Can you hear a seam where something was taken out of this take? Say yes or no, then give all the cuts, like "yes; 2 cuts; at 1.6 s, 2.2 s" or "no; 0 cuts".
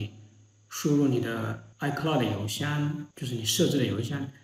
yes; 2 cuts; at 1.7 s, 3.1 s